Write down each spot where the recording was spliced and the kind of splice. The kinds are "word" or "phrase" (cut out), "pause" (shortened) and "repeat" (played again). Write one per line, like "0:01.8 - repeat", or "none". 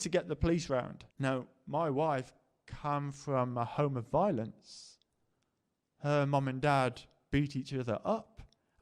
0:01.1 - pause